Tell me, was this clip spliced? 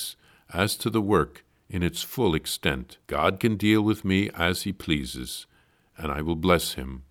yes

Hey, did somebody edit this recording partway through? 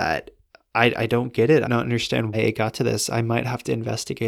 yes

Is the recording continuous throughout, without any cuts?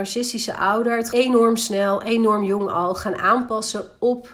no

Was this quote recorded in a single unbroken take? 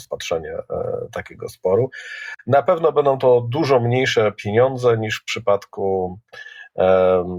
yes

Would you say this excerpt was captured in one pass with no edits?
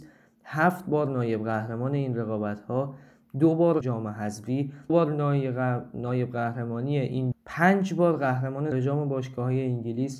no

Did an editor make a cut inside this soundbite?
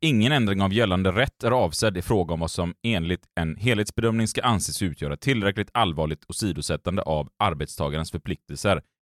no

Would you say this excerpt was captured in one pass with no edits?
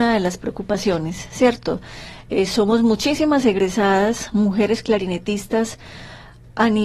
yes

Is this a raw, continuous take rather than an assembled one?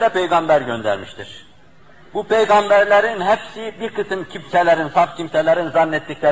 yes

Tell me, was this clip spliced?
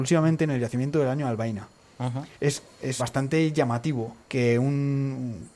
yes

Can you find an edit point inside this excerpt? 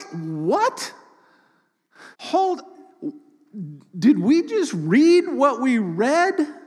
yes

